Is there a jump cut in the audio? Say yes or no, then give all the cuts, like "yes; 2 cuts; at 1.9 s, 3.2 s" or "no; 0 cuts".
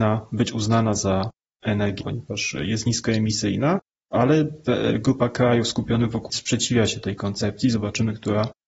yes; 2 cuts; at 2.0 s, 6.3 s